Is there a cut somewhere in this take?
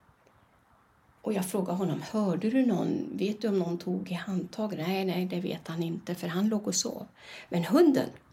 no; 0 cuts

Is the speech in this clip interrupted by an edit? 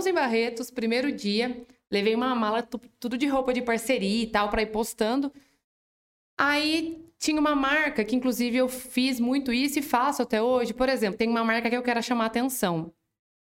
no; 0 cuts

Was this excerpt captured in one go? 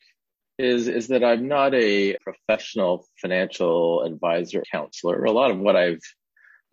no; 2 cuts; at 2.2 s, 4.6 s

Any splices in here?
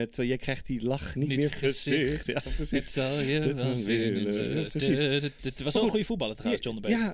yes; 1 cut; at 1.5 s

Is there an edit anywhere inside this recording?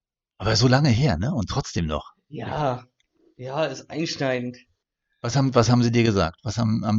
no; 0 cuts

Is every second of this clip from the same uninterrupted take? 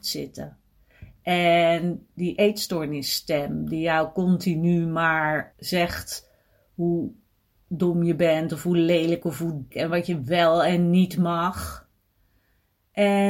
no; 3 cuts; at 2.4 s, 5.5 s, 9.7 s

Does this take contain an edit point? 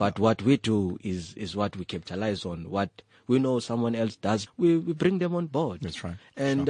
yes; 1 cut; at 4.5 s

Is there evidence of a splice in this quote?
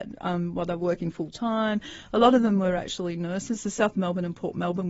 no; 0 cuts

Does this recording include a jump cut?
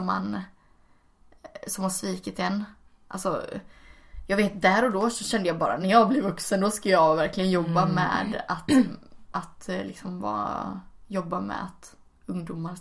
no; 0 cuts

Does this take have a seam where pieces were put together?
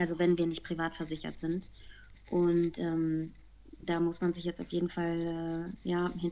no; 0 cuts

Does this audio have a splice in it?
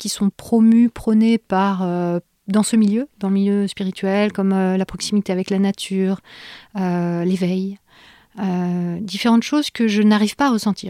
no; 0 cuts

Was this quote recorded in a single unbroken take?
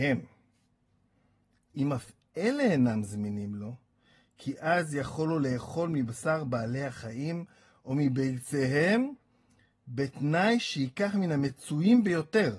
yes; 0 cuts

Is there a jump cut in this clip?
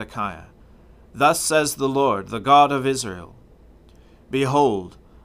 no; 0 cuts

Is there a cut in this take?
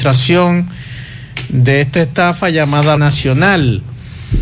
yes; 1 cut; at 3.0 s

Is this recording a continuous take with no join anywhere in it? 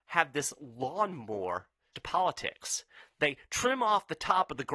no; 1 cut; at 1.9 s

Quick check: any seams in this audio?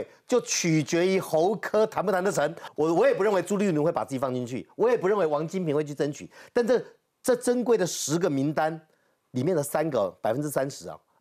no; 0 cuts

